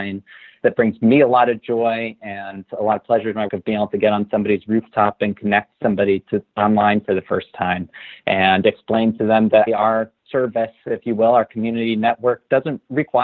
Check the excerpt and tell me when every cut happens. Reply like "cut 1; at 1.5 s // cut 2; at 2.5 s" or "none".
cut 1; at 3.5 s // cut 2; at 9.7 s